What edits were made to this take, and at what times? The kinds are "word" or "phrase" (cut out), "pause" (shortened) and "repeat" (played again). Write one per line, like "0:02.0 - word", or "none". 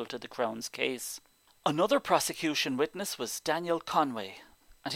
none